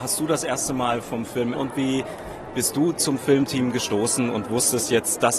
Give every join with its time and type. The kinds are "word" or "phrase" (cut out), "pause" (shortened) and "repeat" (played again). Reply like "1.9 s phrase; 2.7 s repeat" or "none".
1.5 s word